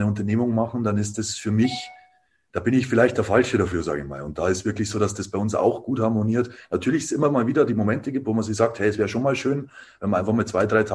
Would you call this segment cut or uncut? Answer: uncut